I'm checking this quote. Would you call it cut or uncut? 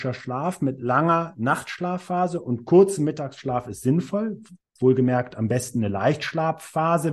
uncut